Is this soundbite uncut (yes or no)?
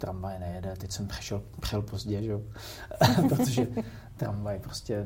yes